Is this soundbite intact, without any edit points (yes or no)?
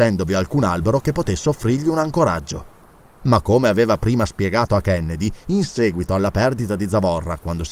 no